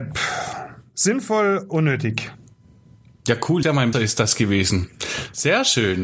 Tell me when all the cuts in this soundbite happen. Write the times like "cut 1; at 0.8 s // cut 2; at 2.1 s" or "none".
cut 1; at 1.7 s // cut 2; at 3.6 s // cut 3; at 3.9 s